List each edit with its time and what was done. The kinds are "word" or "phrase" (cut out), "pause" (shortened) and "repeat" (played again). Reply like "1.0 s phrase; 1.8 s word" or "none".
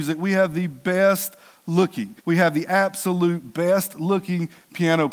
2.2 s pause